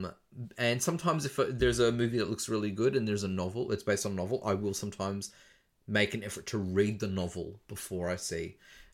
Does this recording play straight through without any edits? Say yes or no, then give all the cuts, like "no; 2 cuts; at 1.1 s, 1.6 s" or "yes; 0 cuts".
yes; 0 cuts